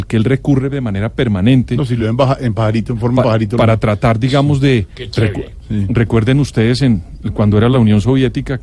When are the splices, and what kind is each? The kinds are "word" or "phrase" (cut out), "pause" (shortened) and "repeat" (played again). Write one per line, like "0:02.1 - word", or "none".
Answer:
none